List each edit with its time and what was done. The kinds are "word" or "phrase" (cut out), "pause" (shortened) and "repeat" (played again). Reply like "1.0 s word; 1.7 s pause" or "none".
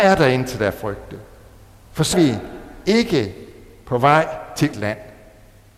2.1 s word; 4.7 s word